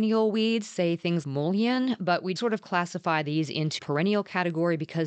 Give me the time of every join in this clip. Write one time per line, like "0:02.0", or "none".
0:01.2
0:02.4
0:03.8